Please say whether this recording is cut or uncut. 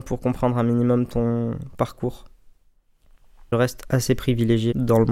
uncut